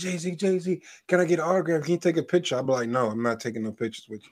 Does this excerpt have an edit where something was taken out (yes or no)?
no